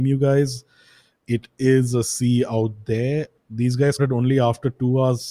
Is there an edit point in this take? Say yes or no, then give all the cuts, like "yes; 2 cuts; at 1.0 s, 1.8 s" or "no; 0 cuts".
yes; 1 cut; at 4.0 s